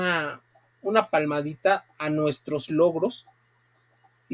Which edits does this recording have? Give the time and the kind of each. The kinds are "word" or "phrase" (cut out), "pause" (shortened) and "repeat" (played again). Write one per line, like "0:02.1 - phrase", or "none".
none